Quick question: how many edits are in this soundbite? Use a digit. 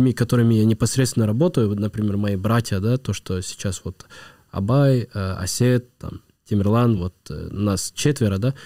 0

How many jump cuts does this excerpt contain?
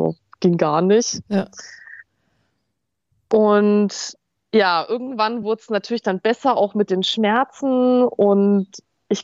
0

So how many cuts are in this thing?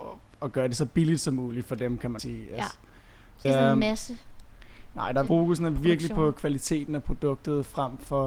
3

